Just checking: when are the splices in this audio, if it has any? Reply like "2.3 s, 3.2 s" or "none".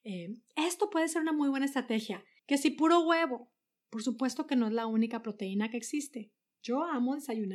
2.4 s